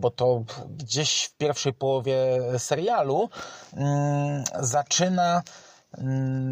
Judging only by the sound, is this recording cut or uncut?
uncut